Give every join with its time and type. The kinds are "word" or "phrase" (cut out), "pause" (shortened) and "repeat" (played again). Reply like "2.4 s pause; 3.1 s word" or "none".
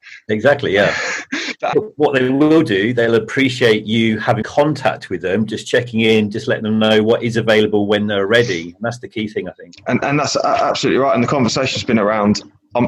1.7 s word; 4.4 s word; 10.0 s word